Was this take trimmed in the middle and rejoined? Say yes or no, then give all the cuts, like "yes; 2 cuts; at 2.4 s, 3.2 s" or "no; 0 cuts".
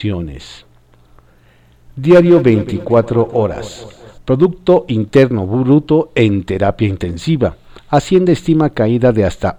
no; 0 cuts